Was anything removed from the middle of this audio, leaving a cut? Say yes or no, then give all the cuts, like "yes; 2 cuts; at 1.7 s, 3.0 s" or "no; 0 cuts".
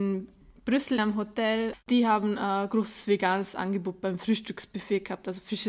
yes; 1 cut; at 1.0 s